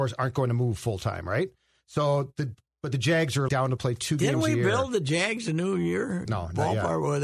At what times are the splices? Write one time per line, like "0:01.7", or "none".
0:03.5
0:06.3